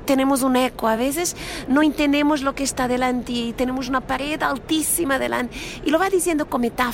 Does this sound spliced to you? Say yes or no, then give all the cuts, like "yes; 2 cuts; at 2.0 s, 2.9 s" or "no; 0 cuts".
no; 0 cuts